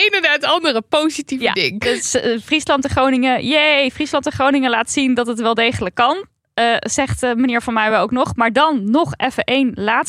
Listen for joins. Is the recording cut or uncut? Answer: uncut